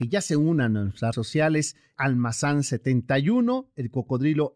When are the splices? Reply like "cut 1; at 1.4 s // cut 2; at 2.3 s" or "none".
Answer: cut 1; at 1.1 s // cut 2; at 1.9 s